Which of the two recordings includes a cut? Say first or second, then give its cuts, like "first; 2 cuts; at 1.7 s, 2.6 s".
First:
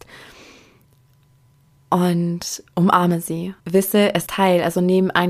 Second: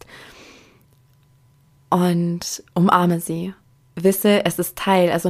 first; 2 cuts; at 3.6 s, 4.3 s